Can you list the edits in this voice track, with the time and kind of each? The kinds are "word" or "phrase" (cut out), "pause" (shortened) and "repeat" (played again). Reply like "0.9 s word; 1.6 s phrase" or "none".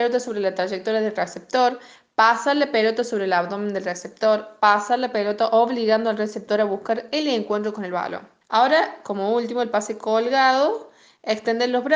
8.4 s pause